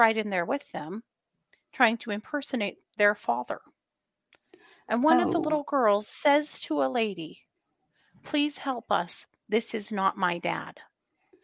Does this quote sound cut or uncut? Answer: uncut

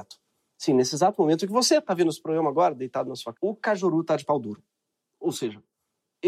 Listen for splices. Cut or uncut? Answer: cut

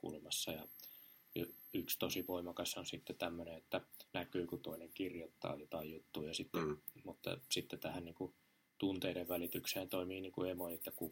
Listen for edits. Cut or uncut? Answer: cut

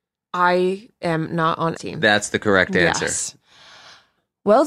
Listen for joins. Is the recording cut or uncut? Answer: cut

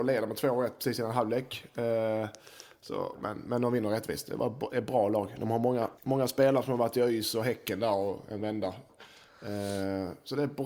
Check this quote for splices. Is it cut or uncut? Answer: cut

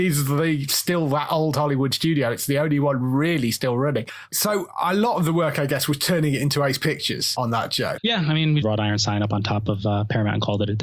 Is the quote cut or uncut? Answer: cut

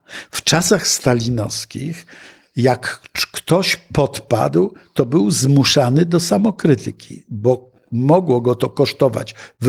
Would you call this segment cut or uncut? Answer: uncut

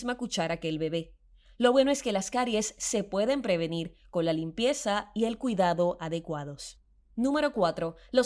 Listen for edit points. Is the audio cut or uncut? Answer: uncut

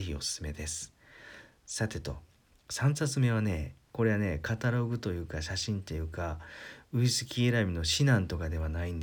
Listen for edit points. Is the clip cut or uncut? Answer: uncut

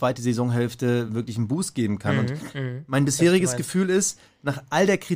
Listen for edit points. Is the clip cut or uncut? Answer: uncut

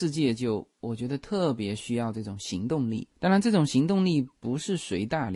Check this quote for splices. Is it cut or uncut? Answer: cut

